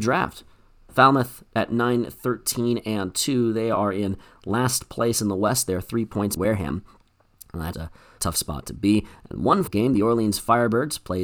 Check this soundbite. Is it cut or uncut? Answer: cut